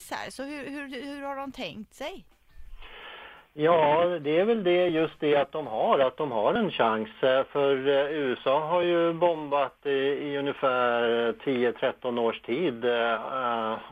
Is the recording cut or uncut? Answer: uncut